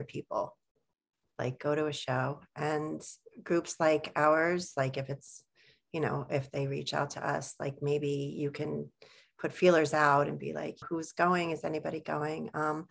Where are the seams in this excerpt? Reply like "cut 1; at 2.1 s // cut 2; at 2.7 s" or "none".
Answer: cut 1; at 10.8 s